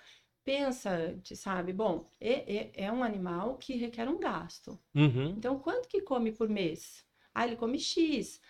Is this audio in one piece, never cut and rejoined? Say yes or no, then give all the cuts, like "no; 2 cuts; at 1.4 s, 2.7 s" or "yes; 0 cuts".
yes; 0 cuts